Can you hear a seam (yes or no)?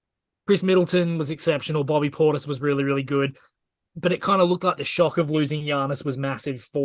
no